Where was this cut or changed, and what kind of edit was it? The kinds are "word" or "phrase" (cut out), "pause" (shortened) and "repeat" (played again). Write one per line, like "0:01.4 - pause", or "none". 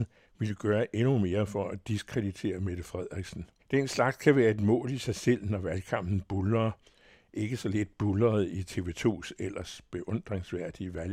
0:03.6 - pause